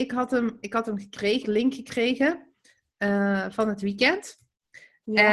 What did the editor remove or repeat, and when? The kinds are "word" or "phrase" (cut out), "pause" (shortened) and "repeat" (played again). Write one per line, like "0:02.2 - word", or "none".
0:01.4 - phrase